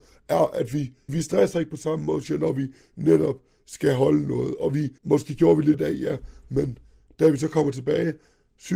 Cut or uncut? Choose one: cut